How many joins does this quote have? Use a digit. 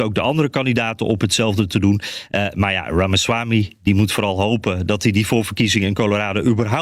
0